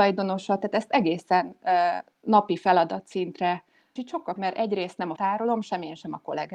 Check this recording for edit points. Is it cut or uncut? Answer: cut